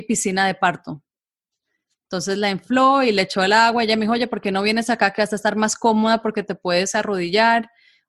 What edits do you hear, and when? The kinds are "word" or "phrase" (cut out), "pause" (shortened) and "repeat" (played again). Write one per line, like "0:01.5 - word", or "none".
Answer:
none